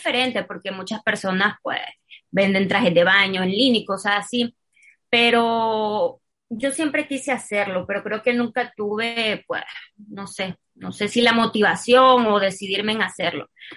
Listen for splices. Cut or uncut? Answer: uncut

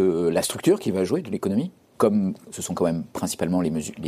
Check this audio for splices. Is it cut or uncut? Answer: cut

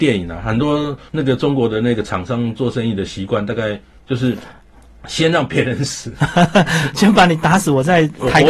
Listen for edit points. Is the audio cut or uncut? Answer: uncut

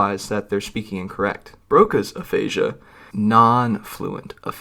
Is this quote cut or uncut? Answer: cut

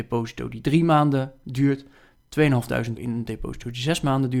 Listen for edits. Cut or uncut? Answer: cut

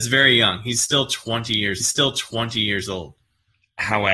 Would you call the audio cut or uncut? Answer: cut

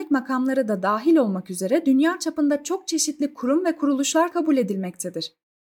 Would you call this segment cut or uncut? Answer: cut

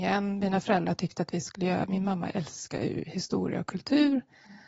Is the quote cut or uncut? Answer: uncut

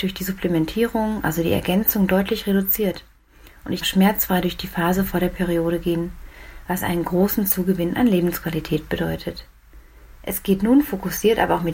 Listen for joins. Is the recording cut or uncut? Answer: cut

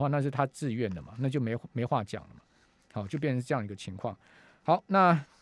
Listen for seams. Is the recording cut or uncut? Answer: uncut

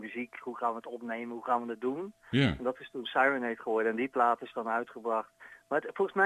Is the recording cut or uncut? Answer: uncut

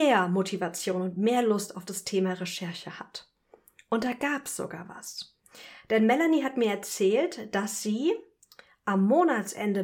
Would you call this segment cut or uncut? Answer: uncut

